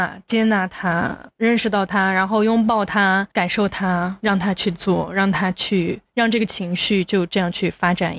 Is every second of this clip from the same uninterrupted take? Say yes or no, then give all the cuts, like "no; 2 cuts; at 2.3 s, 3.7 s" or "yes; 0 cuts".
yes; 0 cuts